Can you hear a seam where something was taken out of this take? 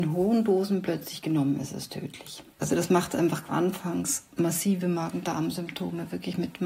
yes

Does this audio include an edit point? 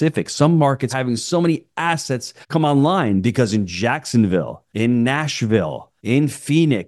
yes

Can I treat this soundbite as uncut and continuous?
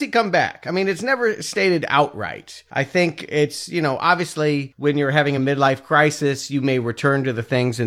yes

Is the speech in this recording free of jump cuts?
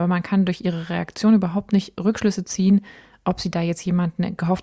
yes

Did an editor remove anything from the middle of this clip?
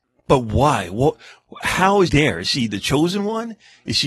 yes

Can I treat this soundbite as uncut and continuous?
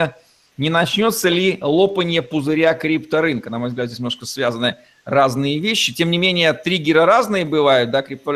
yes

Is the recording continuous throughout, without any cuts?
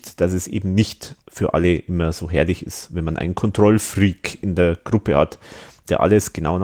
no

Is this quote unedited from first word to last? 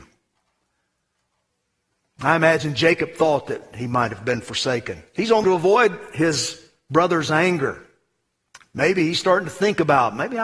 no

